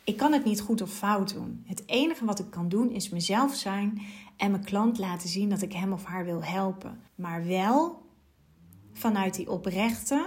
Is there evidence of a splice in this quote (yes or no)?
yes